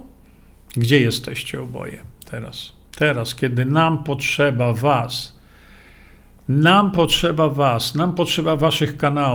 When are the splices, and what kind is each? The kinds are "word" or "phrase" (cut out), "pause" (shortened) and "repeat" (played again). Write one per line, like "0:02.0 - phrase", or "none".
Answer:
0:02.9 - pause